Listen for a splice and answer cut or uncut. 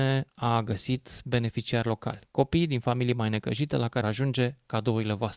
cut